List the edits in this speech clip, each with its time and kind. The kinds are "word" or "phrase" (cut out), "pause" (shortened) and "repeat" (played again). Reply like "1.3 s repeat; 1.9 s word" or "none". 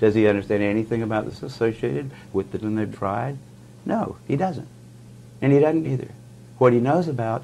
1.4 s word; 2.6 s word; 2.9 s word; 5.8 s phrase